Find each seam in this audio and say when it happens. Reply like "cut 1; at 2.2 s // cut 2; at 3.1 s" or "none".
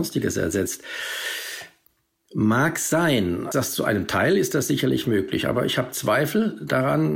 cut 1; at 3.5 s